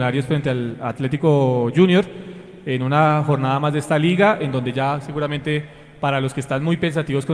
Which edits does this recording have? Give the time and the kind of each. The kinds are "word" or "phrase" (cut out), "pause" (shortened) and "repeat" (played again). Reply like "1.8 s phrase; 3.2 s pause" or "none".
none